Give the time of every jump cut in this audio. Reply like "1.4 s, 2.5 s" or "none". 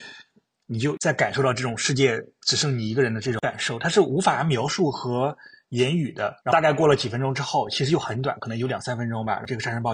6.4 s